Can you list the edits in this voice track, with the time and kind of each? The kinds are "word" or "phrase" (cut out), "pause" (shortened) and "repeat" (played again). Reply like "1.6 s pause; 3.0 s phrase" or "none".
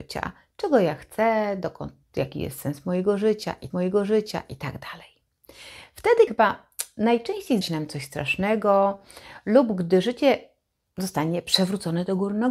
3.7 s repeat; 6.3 s word; 7.6 s word